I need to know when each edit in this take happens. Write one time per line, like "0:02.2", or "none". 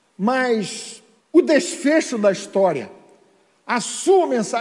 0:01.2